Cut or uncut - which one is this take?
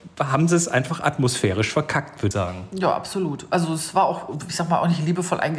cut